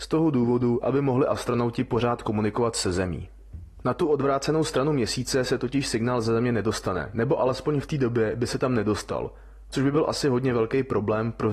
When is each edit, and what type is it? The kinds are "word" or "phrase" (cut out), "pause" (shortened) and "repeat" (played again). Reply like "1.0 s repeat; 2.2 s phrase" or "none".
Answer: none